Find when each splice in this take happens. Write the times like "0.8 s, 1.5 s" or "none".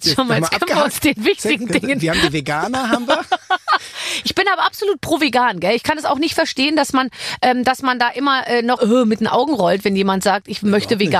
8.8 s